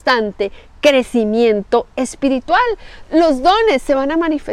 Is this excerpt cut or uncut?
cut